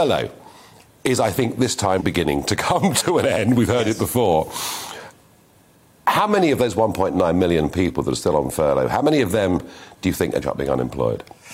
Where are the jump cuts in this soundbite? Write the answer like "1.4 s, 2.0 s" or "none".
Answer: 2.0 s, 10.4 s